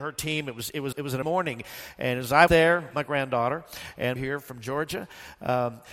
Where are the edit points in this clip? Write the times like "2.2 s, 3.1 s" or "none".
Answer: 0.9 s, 1.2 s, 2.5 s, 2.9 s, 4.2 s